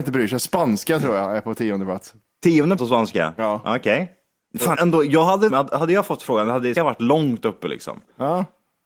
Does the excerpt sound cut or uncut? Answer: cut